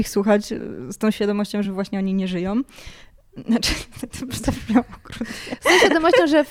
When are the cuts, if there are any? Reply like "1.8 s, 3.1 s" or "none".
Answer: none